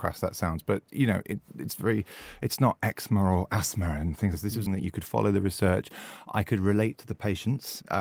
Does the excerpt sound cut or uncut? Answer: cut